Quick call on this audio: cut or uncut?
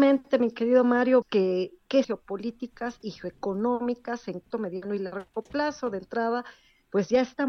cut